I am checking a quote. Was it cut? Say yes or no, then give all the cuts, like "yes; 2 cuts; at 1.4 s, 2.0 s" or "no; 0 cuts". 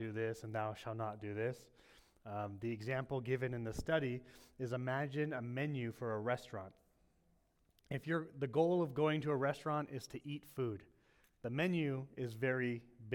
no; 0 cuts